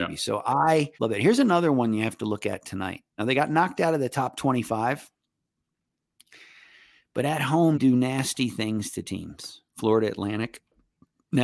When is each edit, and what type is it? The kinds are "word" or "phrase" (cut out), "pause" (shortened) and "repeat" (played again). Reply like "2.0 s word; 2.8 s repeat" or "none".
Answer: 0.9 s pause; 3.1 s pause; 7.7 s word